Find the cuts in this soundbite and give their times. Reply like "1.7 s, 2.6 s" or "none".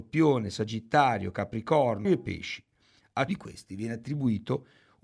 2.0 s, 3.3 s